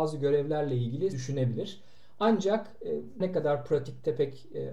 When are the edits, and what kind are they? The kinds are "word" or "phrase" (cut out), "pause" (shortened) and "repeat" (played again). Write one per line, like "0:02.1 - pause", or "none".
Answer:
0:01.1 - word
0:03.2 - word

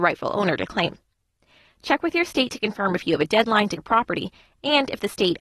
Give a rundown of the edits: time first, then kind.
0:03.8 - word

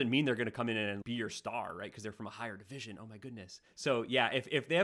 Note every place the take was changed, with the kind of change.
0:01.0 - word

